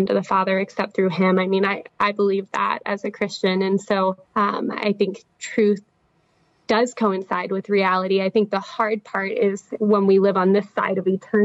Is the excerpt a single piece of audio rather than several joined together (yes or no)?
no